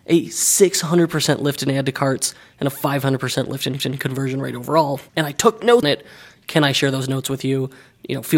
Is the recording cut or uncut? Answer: cut